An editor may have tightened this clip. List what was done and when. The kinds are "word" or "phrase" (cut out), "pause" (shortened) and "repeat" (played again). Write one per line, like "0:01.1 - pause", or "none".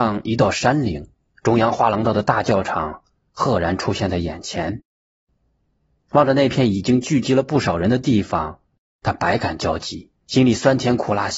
0:10.2 - pause